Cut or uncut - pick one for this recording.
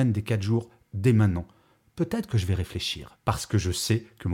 uncut